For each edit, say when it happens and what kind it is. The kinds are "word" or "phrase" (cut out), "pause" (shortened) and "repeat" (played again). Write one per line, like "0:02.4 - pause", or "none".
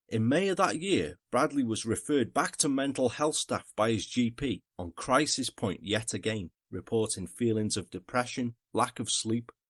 none